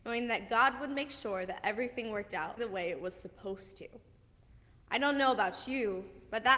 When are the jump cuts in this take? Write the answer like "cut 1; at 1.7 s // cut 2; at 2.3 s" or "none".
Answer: cut 1; at 2.6 s